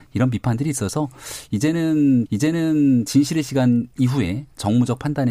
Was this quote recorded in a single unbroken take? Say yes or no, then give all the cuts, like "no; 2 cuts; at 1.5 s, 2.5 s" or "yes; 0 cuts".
no; 2 cuts; at 2.3 s, 3.9 s